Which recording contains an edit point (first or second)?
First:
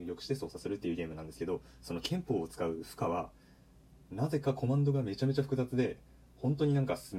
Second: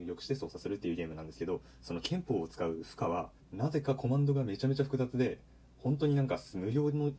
second